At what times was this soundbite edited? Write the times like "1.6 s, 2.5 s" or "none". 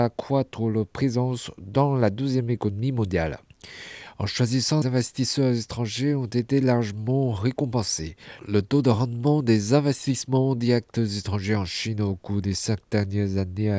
4.8 s